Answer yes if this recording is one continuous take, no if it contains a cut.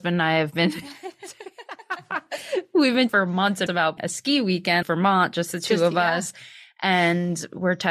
no